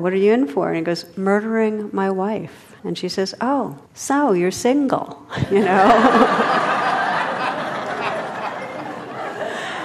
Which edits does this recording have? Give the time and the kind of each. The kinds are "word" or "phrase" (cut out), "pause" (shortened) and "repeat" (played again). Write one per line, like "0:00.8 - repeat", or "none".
0:02.8 - pause
0:03.9 - pause

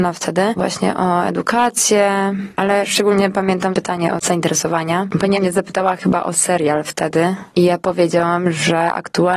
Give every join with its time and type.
0:05.3 - word

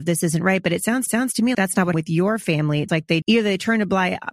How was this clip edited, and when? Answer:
0:01.1 - repeat
0:01.5 - word
0:01.9 - word
0:02.9 - word
0:03.2 - word

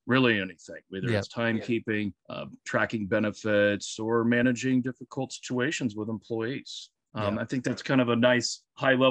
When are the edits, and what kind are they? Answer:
0:02.2 - pause

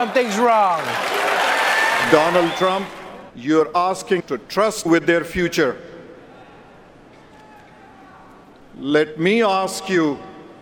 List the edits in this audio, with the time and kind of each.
0:03.3 - pause
0:04.2 - word
0:04.9 - word

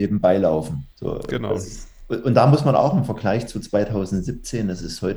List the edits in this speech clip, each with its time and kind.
0:00.9 - pause

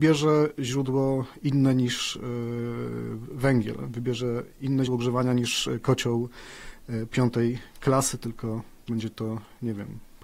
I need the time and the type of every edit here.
0:04.9 - word

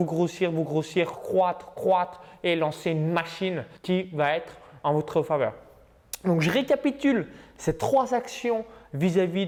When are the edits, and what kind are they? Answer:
0:01.1 - word
0:03.8 - pause

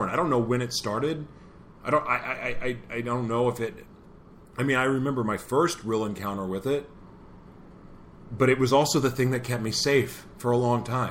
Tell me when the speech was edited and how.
none

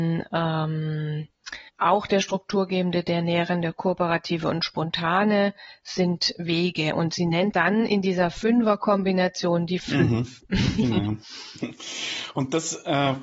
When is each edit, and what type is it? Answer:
0:01.7 - pause
0:07.5 - word
0:09.8 - word

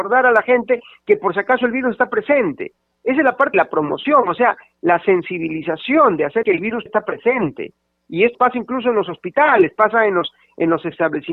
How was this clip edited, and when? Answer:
0:03.5 - word
0:06.4 - word
0:06.9 - word
0:08.3 - word

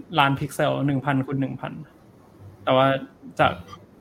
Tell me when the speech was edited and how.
0:02.5 - pause

